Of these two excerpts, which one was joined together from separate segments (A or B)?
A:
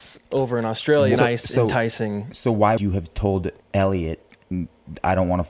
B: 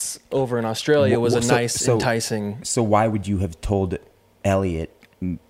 A